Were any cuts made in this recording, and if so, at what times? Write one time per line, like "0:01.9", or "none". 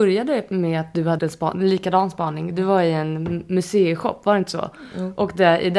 0:01.2